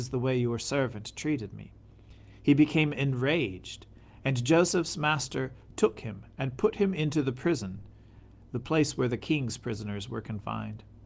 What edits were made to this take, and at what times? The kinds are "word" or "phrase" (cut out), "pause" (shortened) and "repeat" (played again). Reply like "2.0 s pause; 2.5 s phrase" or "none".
none